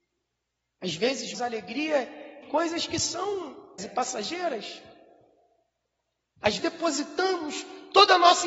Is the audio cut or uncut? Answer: cut